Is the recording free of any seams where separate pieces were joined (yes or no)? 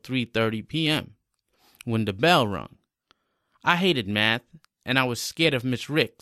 yes